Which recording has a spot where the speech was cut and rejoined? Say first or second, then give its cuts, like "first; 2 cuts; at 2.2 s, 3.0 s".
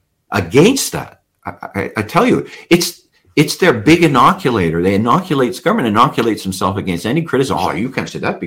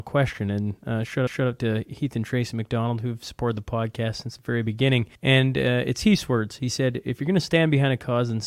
second; 2 cuts; at 1.3 s, 5.2 s